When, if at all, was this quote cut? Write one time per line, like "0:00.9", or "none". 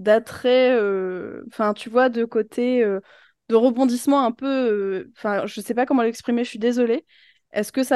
none